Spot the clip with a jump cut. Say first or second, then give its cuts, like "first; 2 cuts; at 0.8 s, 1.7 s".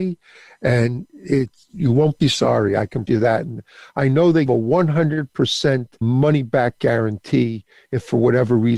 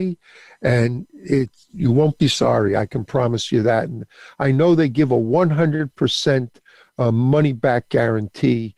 first; 3 cuts; at 3.1 s, 4.5 s, 6.0 s